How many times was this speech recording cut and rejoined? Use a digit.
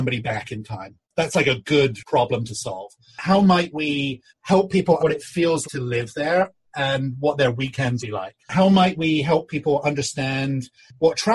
6